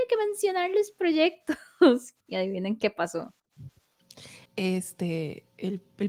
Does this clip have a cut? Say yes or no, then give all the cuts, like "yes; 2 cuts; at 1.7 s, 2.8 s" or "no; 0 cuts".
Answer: yes; 2 cuts; at 2.2 s, 4.5 s